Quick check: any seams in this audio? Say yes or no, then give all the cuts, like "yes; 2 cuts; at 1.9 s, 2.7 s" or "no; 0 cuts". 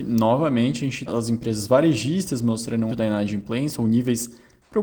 yes; 2 cuts; at 1.1 s, 2.9 s